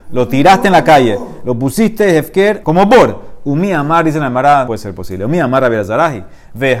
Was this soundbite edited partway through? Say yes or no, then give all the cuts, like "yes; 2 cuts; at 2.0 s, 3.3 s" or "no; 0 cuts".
yes; 2 cuts; at 2.6 s, 4.7 s